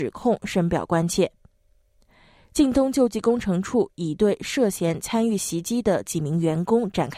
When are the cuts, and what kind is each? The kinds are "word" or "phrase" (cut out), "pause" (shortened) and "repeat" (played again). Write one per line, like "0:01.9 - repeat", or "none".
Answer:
none